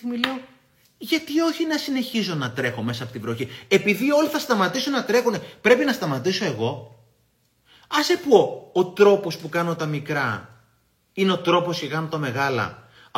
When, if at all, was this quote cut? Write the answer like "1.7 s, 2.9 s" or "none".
none